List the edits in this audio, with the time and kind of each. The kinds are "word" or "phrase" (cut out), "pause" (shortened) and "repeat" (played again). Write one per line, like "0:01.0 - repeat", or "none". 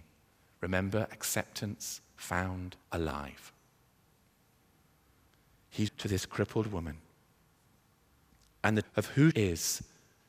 0:02.8 - pause
0:05.9 - word
0:08.8 - word
0:09.3 - word